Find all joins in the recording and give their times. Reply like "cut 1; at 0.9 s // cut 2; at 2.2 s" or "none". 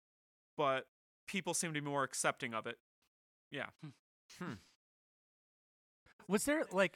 none